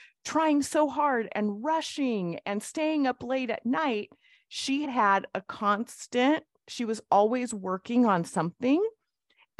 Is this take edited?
yes; 1 cut; at 4.9 s

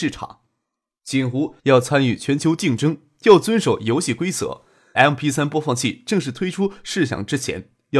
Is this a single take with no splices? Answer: no; 2 cuts; at 1.6 s, 5.0 s

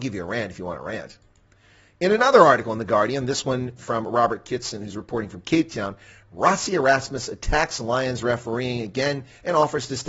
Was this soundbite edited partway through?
no; 0 cuts

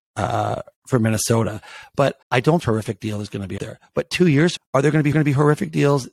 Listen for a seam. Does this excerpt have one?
yes; 5 cuts; at 2.2 s, 2.6 s, 3.6 s, 4.6 s, 5.1 s

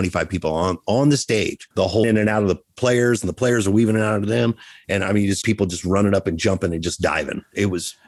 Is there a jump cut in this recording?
yes; 3 cuts; at 1.7 s, 2.0 s, 5.4 s

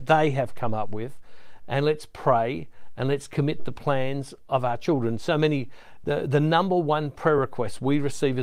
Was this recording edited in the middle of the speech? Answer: no; 0 cuts

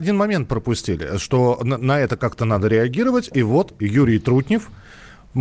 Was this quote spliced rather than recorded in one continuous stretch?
no; 0 cuts

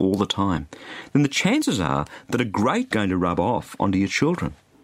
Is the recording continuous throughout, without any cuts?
no; 1 cut; at 2.9 s

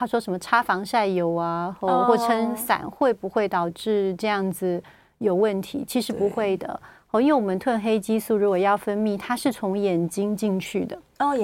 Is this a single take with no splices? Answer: yes; 0 cuts

